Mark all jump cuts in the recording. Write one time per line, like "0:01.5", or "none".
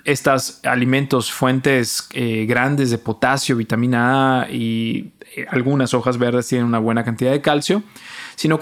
none